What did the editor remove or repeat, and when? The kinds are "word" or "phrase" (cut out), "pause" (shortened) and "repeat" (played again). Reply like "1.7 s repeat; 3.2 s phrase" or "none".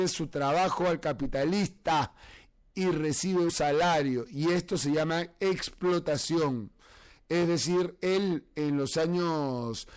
3.5 s word